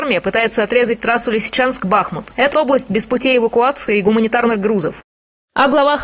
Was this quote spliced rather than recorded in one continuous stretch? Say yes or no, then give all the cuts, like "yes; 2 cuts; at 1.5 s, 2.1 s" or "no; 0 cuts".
yes; 1 cut; at 2.5 s